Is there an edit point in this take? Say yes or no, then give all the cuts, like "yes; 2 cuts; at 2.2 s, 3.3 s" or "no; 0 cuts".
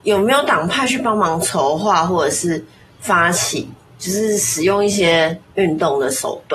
yes; 1 cut; at 5.4 s